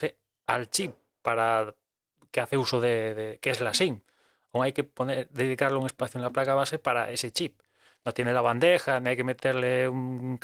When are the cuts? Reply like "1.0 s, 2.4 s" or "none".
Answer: none